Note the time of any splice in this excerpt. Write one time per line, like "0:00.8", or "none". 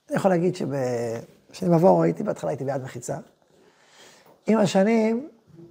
none